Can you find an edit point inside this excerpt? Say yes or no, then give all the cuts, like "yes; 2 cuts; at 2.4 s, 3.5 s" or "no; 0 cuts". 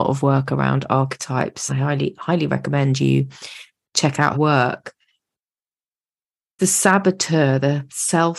yes; 3 cuts; at 1.7 s, 4.3 s, 6.6 s